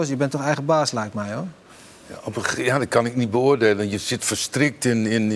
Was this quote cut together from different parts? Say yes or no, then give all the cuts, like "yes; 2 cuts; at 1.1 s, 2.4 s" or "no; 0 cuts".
no; 0 cuts